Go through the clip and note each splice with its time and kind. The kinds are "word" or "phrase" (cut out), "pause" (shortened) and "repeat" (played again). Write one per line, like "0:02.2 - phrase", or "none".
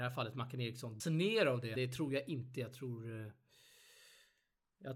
0:01.0 - word
0:01.7 - word